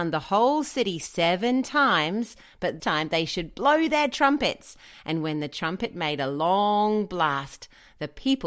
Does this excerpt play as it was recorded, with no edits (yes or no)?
no